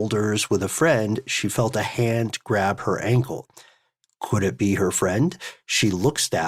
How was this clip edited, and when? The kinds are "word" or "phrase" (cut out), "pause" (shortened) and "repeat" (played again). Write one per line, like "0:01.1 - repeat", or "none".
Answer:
none